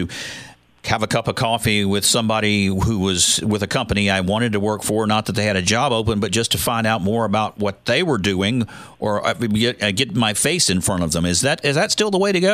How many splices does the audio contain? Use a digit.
1